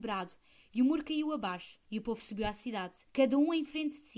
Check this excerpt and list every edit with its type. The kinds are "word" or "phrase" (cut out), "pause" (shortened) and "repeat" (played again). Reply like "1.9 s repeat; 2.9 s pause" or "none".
1.8 s pause; 3.1 s pause